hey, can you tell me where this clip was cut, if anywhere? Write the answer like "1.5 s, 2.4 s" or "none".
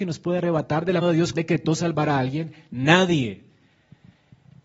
1.0 s, 1.3 s